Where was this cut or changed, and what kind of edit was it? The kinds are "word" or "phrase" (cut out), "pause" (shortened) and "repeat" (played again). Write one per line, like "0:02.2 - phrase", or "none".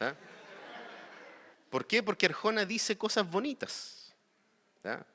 0:01.5 - pause